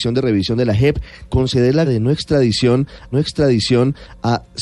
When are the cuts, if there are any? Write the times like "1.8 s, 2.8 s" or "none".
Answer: 1.3 s, 1.8 s, 3.1 s